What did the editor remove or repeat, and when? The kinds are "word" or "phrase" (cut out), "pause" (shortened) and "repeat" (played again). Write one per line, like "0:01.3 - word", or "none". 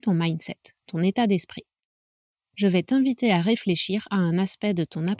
none